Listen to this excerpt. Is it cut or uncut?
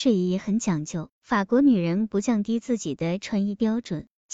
cut